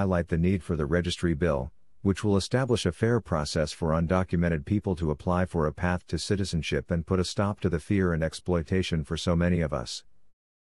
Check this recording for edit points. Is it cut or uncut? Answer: uncut